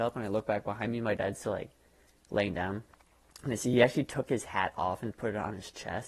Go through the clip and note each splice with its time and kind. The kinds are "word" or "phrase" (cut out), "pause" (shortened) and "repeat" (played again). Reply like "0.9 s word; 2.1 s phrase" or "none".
none